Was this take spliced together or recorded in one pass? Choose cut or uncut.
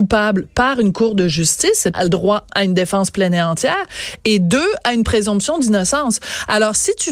cut